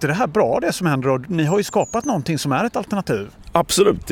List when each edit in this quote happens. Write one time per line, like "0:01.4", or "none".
none